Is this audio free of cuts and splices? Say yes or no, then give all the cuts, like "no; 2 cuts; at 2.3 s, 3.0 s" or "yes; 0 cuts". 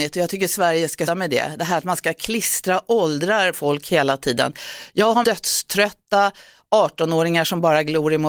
no; 3 cuts; at 1.1 s, 3.5 s, 5.2 s